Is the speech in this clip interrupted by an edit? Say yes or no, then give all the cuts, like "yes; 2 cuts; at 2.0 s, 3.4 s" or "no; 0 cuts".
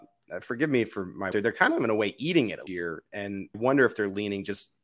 yes; 3 cuts; at 1.3 s, 2.7 s, 3.5 s